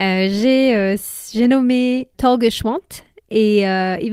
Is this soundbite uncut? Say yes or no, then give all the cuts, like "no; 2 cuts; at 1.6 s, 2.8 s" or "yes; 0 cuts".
no; 1 cut; at 2.1 s